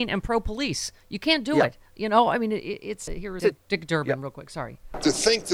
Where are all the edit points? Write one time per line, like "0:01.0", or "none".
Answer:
0:03.1
0:03.4